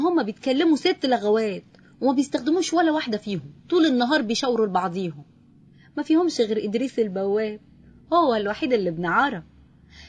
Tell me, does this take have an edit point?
no; 0 cuts

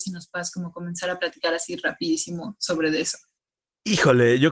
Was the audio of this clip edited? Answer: no; 0 cuts

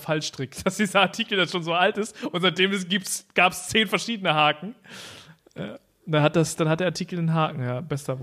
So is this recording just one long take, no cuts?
yes; 0 cuts

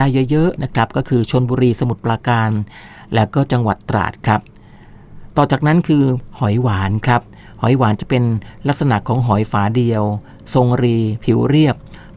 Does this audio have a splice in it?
no; 0 cuts

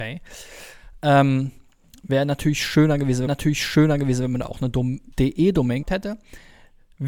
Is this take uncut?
no; 2 cuts; at 3.3 s, 5.8 s

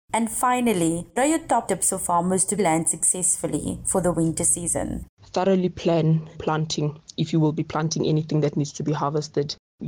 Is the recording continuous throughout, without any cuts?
no; 5 cuts; at 1.2 s, 1.7 s, 2.6 s, 5.1 s, 6.3 s

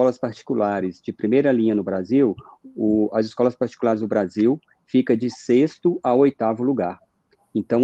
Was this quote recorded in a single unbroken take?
yes; 0 cuts

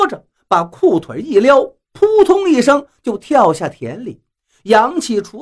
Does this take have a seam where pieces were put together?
no; 0 cuts

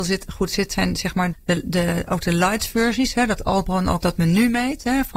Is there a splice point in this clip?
yes; 2 cuts; at 1.3 s, 4.0 s

